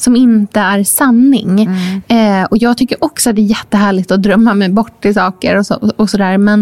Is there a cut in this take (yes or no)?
no